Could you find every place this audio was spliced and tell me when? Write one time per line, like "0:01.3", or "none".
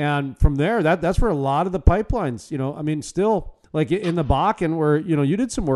0:03.6